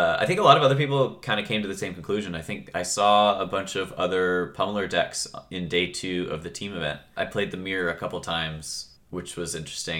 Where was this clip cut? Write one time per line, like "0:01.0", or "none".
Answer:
none